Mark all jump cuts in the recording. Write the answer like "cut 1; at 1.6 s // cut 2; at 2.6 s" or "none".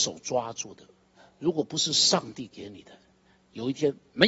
none